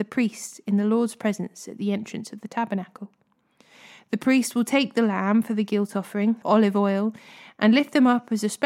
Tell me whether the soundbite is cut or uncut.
cut